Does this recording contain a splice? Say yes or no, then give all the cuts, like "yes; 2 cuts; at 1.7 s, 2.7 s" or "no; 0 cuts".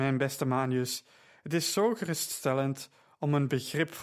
no; 0 cuts